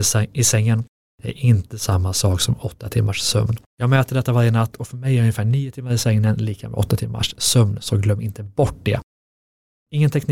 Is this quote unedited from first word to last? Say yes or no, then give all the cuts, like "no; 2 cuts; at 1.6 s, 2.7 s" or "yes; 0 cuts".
no; 1 cut; at 3.7 s